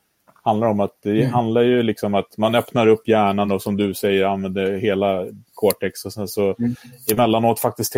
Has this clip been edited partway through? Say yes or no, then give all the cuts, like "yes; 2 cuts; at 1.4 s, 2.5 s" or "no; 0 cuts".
no; 0 cuts